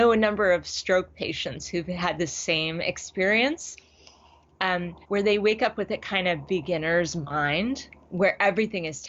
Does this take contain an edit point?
yes; 2 cuts; at 5.0 s, 8.1 s

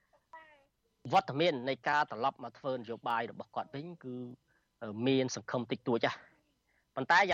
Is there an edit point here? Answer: no; 0 cuts

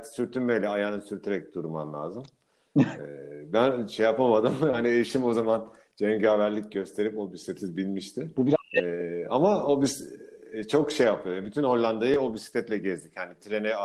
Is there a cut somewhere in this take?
no; 0 cuts

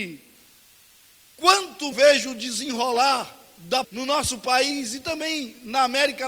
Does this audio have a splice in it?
yes; 2 cuts; at 1.9 s, 3.8 s

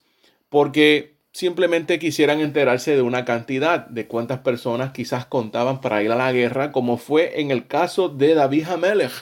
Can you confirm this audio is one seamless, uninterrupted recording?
yes; 0 cuts

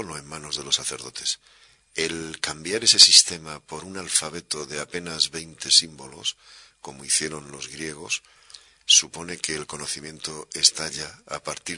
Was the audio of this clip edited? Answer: no; 0 cuts

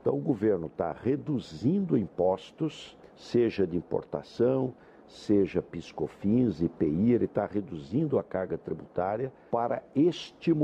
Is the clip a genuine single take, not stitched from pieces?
yes; 0 cuts

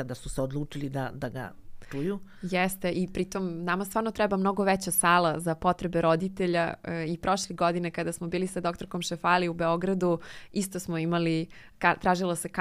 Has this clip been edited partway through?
no; 0 cuts

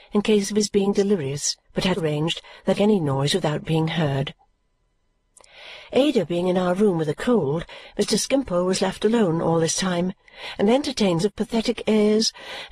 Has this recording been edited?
yes; 4 cuts; at 1.6 s, 2.0 s, 2.8 s, 11.2 s

